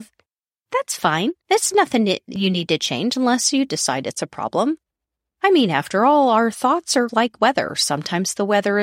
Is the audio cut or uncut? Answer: cut